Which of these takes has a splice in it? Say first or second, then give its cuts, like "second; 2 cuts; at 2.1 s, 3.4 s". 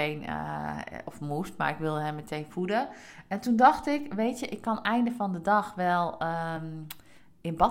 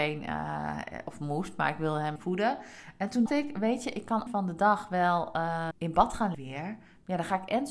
second; 5 cuts; at 2.2 s, 3.3 s, 4.3 s, 5.7 s, 6.3 s